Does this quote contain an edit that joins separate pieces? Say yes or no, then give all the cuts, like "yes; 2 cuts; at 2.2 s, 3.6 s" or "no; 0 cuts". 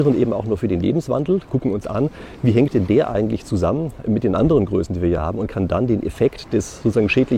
no; 0 cuts